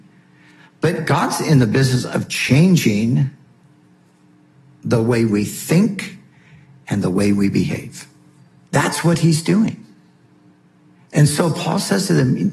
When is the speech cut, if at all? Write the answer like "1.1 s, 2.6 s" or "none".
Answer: none